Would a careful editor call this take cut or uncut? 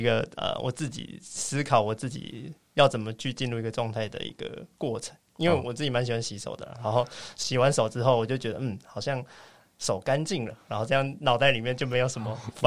uncut